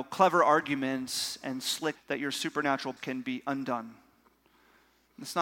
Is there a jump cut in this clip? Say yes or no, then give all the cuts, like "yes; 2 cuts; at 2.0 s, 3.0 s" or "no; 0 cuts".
yes; 2 cuts; at 2.0 s, 3.0 s